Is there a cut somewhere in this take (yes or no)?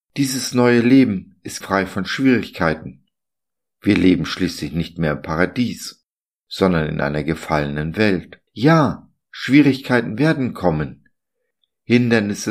yes